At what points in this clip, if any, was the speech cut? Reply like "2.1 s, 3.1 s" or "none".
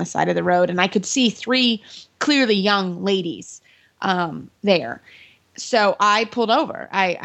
4.6 s

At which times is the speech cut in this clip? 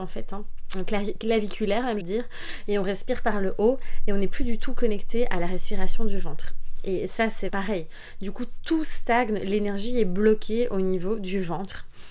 2.0 s, 7.5 s

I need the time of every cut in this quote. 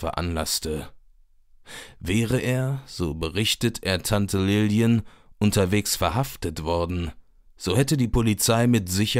none

